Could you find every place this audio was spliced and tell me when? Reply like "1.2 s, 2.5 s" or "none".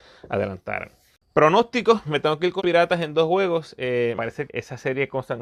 2.0 s, 2.6 s, 4.2 s, 4.5 s